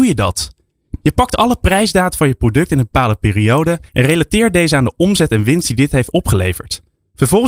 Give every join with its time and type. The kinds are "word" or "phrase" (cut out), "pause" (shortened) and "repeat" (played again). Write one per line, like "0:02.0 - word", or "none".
0:03.9 - pause